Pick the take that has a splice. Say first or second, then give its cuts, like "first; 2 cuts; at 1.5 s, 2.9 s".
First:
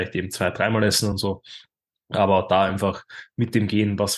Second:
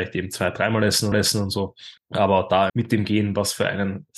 second; 3 cuts; at 1.1 s, 2.0 s, 2.7 s